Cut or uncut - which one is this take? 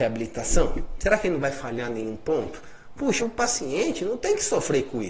cut